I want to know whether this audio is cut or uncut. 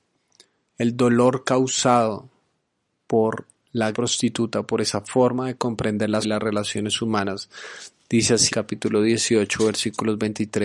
cut